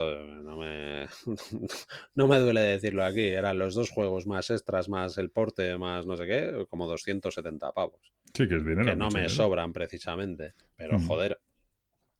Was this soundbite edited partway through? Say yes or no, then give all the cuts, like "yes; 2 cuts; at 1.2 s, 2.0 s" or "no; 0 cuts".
yes; 1 cut; at 10.6 s